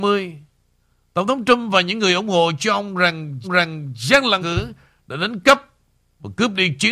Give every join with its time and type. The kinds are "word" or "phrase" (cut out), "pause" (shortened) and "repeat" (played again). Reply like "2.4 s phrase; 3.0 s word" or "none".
3.4 s repeat; 4.4 s word